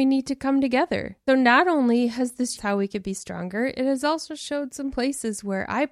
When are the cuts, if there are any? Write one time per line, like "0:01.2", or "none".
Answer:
0:01.3
0:02.6

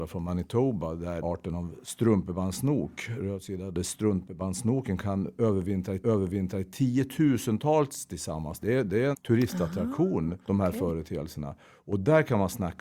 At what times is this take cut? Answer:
0:01.2
0:06.0
0:09.1
0:10.4

